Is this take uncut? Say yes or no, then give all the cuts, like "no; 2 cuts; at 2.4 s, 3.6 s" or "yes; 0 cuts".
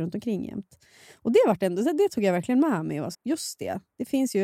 no; 1 cut; at 3.1 s